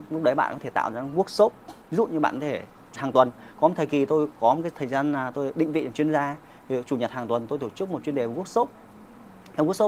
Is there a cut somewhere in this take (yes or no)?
yes